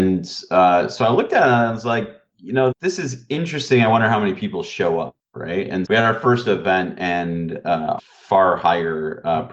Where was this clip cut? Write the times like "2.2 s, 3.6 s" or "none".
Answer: 2.7 s, 5.8 s, 8.0 s